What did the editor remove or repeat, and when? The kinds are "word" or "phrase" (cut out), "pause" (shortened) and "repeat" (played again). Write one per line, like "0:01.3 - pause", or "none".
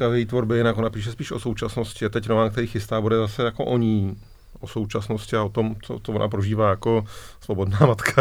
none